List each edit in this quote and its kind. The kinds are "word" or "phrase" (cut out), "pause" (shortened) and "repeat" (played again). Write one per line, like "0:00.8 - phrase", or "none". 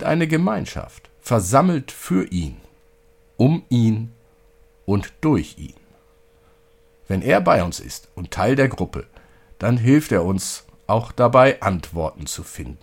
none